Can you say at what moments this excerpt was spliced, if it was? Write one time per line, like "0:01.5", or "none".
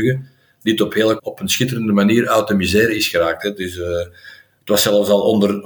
0:01.2